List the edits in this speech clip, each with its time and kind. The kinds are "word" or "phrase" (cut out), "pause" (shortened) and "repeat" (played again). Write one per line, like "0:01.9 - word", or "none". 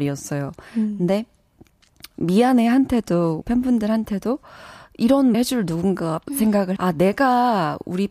0:02.1 - word
0:03.4 - word
0:05.3 - word
0:06.3 - word
0:06.8 - word